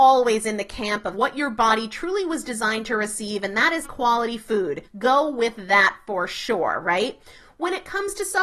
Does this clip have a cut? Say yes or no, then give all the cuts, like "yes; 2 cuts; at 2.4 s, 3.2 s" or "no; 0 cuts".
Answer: yes; 3 cuts; at 1.1 s, 3.8 s, 4.9 s